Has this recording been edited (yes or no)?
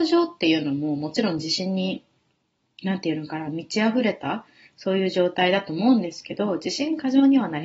no